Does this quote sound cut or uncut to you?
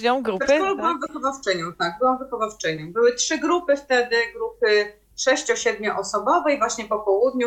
uncut